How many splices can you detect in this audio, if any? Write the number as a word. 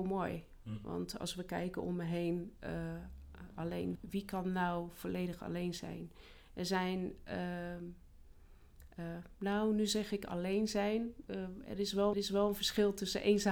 three